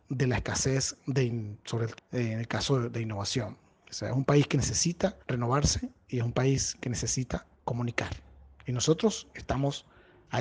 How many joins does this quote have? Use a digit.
3